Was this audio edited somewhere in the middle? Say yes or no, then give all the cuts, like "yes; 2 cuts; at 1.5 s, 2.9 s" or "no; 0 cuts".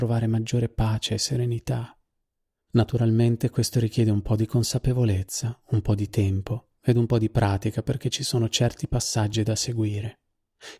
no; 0 cuts